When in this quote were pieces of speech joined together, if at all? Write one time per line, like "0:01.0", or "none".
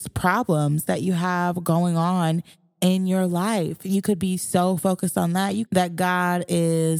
0:05.7